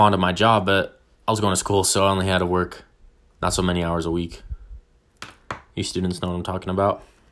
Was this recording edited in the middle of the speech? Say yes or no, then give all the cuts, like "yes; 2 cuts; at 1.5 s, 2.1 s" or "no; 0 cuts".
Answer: no; 0 cuts